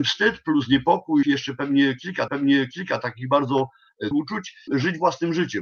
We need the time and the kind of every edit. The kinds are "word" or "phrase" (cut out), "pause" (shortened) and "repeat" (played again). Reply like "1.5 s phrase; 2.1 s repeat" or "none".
1.2 s word; 2.3 s repeat; 4.1 s word; 4.7 s word